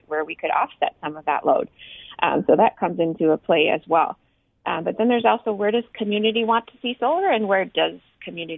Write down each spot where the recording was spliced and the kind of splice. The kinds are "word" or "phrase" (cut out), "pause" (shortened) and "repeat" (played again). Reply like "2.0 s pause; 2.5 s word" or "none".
none